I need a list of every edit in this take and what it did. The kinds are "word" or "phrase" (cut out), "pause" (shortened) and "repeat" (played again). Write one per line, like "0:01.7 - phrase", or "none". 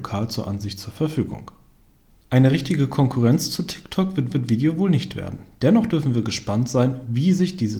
0:04.3 - repeat